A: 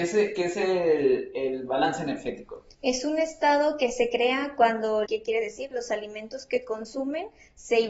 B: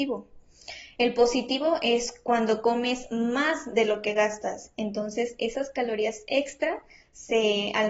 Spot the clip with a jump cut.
A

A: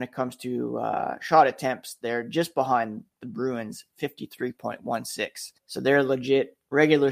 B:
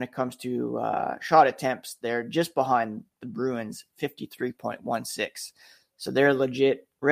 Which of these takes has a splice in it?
A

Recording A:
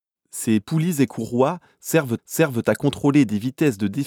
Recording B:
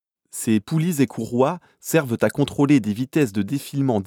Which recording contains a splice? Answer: A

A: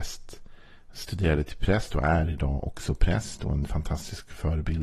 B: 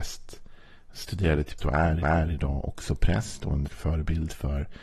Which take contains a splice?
B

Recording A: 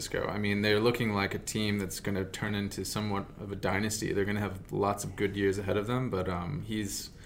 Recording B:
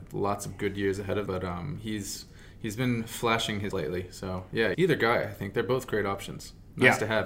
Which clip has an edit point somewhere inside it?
B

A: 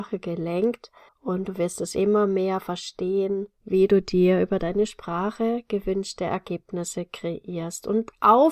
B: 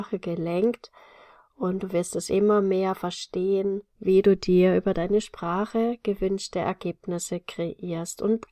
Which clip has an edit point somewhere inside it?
A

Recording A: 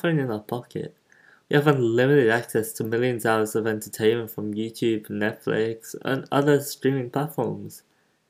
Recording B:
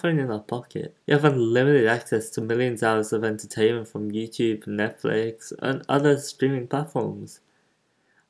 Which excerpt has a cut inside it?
B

